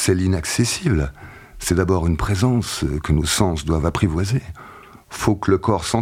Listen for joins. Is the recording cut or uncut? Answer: uncut